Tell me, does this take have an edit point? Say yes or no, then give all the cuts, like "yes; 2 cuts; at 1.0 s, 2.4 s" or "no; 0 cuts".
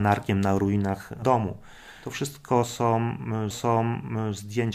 yes; 2 cuts; at 1.2 s, 3.5 s